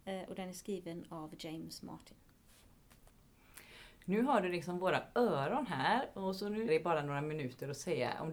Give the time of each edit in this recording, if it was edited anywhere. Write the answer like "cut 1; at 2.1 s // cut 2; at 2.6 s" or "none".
cut 1; at 6.7 s